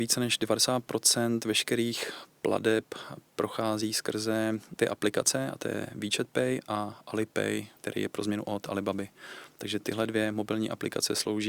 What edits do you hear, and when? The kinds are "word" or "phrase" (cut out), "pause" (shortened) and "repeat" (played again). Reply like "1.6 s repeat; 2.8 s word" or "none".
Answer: 7.8 s pause